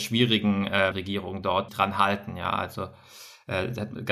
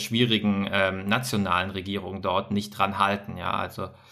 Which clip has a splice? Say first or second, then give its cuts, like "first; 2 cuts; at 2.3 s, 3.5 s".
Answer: first; 2 cuts; at 0.9 s, 1.7 s